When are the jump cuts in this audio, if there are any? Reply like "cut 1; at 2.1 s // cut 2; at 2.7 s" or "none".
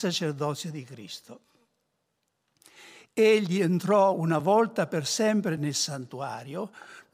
none